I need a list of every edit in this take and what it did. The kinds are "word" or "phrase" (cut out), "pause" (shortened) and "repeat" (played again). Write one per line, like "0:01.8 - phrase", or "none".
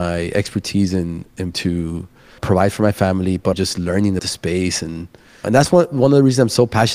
0:01.5 - word
0:02.4 - word
0:03.5 - word
0:04.2 - word
0:05.4 - word